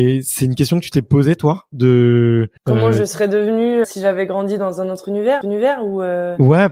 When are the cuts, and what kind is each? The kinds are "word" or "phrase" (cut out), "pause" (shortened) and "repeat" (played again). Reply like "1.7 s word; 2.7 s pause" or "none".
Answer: 2.6 s pause; 3.8 s word; 5.4 s repeat